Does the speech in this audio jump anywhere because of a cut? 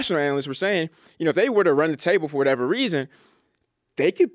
no; 0 cuts

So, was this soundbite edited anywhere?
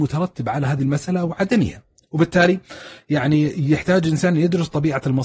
no; 0 cuts

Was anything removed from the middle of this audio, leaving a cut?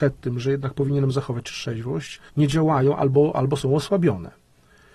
yes; 1 cut; at 2.3 s

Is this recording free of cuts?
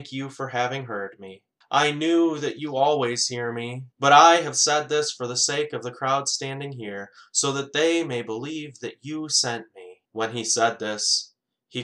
no; 3 cuts; at 1.6 s, 3.9 s, 10.1 s

